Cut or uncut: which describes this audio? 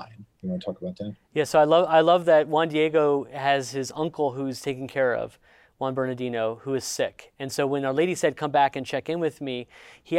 uncut